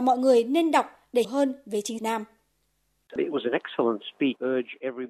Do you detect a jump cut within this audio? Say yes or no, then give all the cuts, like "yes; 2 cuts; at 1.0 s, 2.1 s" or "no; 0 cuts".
yes; 2 cuts; at 1.2 s, 2.0 s